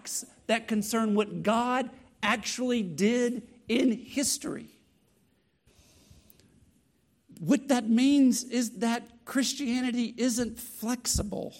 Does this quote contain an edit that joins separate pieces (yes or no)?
no